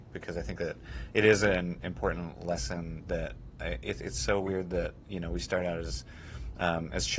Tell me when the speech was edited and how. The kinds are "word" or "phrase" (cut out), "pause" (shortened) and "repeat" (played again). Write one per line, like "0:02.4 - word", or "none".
none

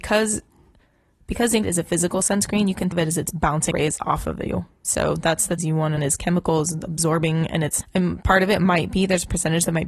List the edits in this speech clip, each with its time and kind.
0:01.6 - word
0:02.9 - word
0:03.7 - word
0:05.6 - word
0:06.0 - word
0:07.8 - word

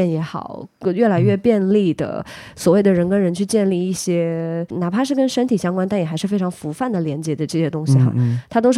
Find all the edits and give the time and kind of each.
none

